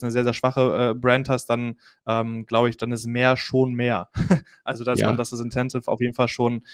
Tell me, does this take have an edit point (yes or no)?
no